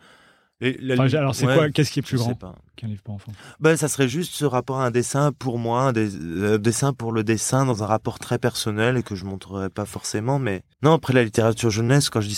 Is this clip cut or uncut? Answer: cut